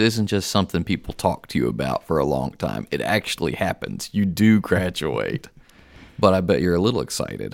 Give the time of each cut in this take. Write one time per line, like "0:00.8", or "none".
none

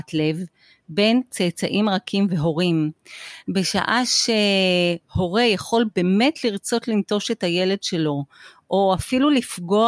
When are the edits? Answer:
none

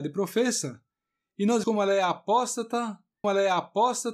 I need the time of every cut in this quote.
0:01.6
0:03.2

